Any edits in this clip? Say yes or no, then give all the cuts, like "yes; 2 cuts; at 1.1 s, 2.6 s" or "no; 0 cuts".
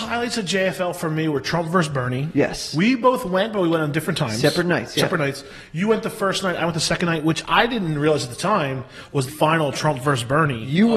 yes; 1 cut; at 9.3 s